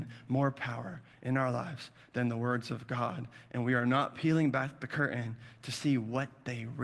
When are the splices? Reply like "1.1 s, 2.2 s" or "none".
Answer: none